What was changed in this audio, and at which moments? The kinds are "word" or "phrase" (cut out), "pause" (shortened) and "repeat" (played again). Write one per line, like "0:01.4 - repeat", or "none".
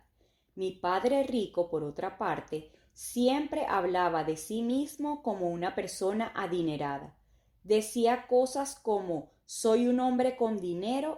none